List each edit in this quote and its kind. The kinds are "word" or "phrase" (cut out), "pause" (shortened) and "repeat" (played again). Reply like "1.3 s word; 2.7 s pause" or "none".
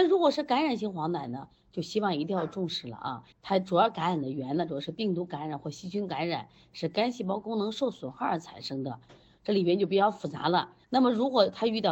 3.3 s pause; 10.8 s pause

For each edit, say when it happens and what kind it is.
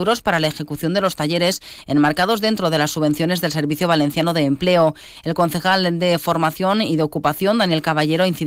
none

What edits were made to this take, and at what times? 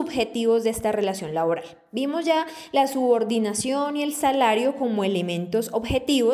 none

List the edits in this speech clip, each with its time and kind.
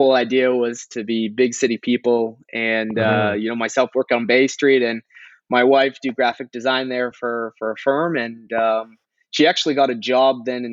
none

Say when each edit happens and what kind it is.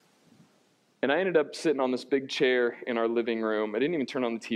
none

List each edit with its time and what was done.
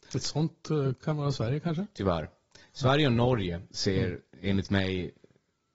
none

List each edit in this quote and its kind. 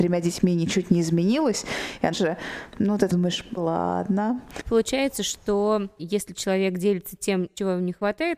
2.1 s phrase; 3.6 s word

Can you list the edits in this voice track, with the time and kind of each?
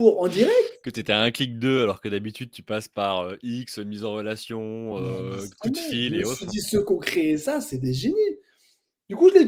none

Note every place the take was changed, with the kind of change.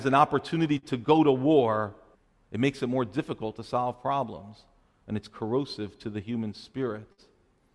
2.1 s pause

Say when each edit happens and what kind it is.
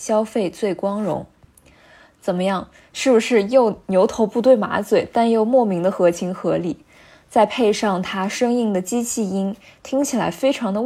1.4 s pause

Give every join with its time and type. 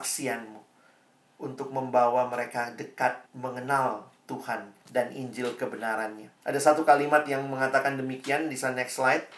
3.3 s pause; 4.8 s pause; 6.4 s pause

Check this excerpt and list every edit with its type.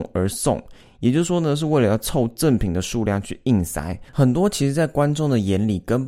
4.1 s pause

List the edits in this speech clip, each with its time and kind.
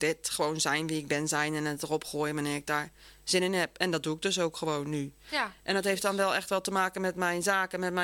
none

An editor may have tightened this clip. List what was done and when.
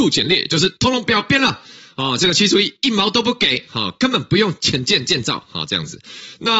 none

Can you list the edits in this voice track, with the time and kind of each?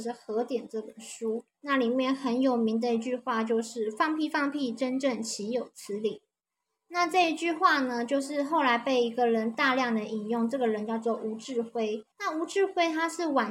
1.5 s pause; 12.1 s pause

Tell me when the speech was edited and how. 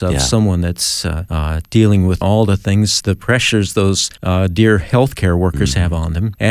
2.2 s phrase; 3.0 s word

